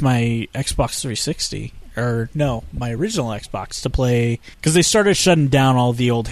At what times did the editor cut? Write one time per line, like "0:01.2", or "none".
0:04.5